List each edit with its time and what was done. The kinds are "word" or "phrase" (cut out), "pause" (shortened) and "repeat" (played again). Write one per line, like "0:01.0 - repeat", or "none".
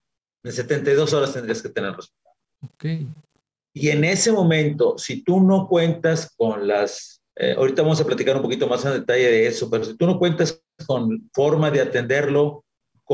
0:07.3 - pause